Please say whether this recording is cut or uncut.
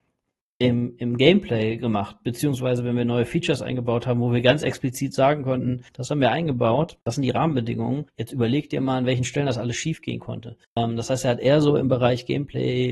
cut